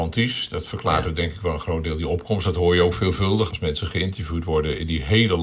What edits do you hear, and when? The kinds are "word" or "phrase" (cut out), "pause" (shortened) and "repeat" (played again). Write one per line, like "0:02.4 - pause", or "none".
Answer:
0:03.5 - word